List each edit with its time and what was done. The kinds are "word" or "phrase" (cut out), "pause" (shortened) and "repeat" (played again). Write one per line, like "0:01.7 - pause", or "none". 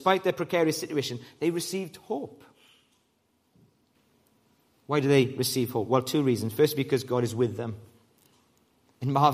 none

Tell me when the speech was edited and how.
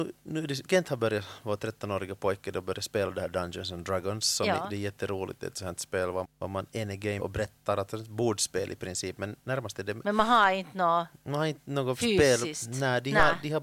0:06.2 - word
0:07.2 - word

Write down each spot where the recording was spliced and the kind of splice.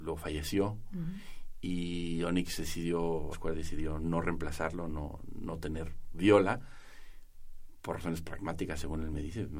0:03.3 - word

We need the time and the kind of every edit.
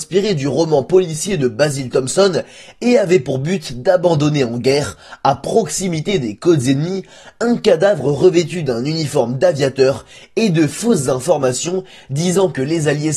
none

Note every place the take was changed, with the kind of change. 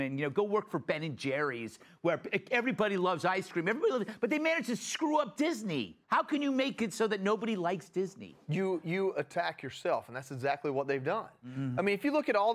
0:06.0 - pause

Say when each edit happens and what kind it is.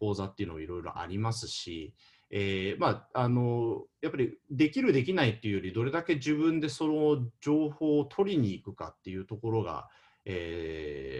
none

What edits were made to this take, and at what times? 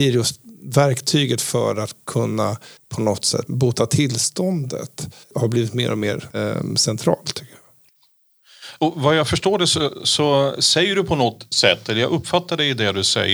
0:02.8 - pause
0:05.2 - pause

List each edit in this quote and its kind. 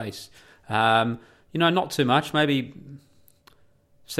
none

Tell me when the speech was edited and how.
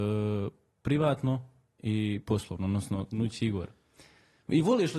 none

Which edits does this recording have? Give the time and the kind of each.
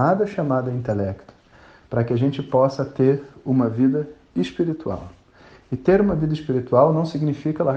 none

